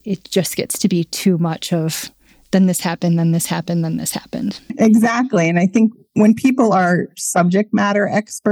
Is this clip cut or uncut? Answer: uncut